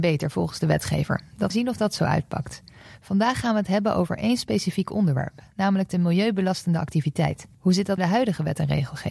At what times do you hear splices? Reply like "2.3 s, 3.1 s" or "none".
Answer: 1.5 s, 7.5 s, 8.0 s